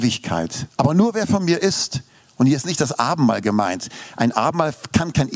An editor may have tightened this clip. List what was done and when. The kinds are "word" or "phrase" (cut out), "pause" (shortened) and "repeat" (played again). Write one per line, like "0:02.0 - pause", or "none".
none